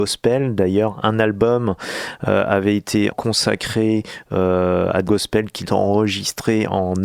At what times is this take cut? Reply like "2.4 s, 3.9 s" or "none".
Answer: 3.1 s, 5.1 s, 5.6 s